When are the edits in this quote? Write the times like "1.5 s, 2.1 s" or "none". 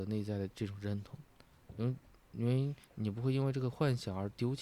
2.8 s